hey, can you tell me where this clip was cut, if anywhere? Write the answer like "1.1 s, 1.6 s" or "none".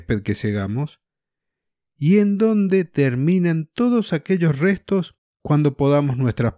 none